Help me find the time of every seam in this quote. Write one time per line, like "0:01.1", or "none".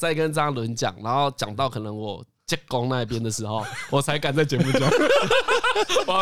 none